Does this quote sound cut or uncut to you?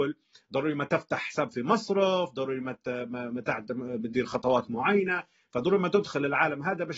uncut